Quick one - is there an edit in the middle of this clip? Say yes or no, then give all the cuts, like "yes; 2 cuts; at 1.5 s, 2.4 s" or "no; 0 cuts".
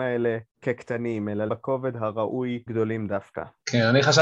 yes; 2 cuts; at 1.5 s, 2.7 s